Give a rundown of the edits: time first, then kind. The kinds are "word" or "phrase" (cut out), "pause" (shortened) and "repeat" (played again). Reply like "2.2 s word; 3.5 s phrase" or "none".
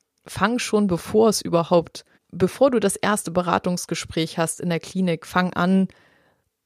2.1 s pause

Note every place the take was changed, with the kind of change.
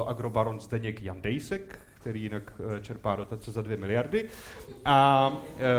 none

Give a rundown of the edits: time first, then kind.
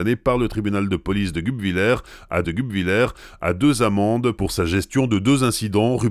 2.4 s repeat

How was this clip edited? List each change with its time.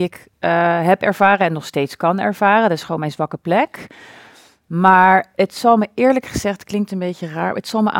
none

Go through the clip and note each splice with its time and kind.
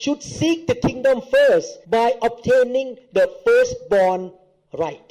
1.8 s pause

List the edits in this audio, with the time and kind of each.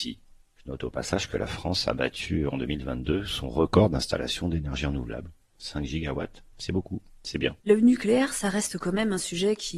7.6 s pause

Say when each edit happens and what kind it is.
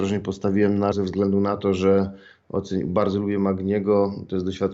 0.9 s word

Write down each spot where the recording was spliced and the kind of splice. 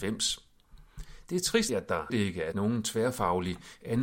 1.7 s phrase; 2.1 s word; 2.5 s word

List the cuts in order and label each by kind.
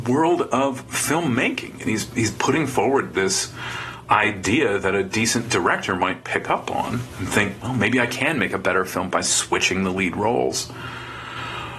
none

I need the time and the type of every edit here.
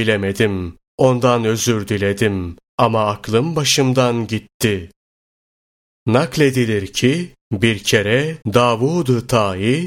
8.4 s pause

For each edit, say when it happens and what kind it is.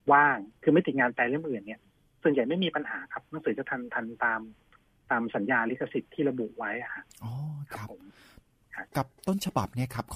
8.9 s pause

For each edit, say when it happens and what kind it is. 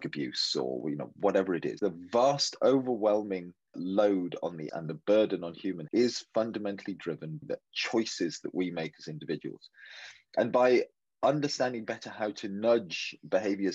1.8 s word; 3.7 s word; 4.7 s word; 5.9 s word; 7.4 s word

